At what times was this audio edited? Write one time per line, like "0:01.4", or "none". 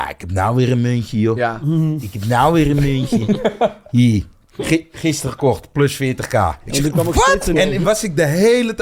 0:07.5